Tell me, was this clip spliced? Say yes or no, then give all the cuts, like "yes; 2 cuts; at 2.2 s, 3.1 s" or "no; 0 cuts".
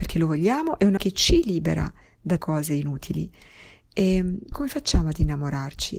yes; 3 cuts; at 1.0 s, 2.4 s, 4.5 s